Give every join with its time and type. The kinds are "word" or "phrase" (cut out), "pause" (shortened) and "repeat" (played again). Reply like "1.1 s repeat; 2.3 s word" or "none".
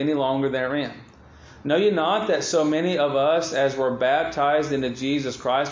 none